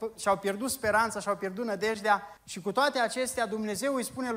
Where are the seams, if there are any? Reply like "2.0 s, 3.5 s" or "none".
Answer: 2.4 s